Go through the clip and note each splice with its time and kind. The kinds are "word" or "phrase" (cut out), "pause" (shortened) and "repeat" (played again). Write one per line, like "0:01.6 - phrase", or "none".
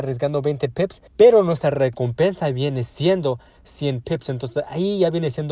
0:01.1 - pause